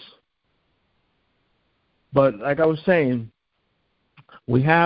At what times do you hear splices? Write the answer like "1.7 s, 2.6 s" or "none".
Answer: none